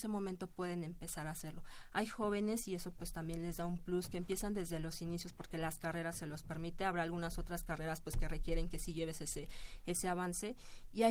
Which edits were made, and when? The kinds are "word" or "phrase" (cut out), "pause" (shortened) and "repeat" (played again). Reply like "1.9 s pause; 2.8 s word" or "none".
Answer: none